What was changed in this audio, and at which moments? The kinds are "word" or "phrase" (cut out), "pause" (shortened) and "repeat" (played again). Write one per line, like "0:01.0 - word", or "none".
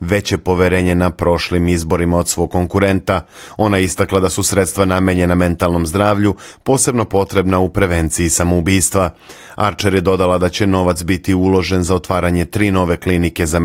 none